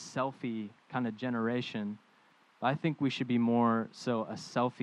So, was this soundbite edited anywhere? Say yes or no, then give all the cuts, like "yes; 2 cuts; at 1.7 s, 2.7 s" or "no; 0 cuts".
no; 0 cuts